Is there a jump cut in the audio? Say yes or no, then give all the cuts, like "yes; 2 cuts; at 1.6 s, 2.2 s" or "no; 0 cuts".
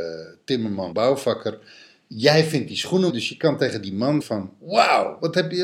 yes; 3 cuts; at 0.9 s, 3.1 s, 4.2 s